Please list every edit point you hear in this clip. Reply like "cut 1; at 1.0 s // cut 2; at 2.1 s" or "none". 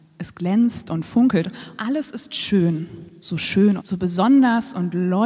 cut 1; at 1.8 s // cut 2; at 3.2 s // cut 3; at 3.8 s